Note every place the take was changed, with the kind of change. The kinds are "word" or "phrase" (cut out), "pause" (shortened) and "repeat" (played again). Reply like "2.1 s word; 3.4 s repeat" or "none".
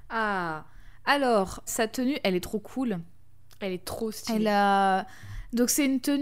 1.7 s word